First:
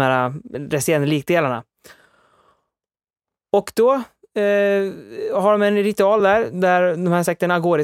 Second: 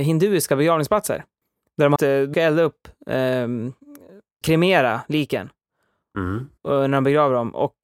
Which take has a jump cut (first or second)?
second